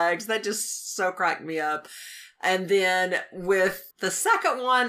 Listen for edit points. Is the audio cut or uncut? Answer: cut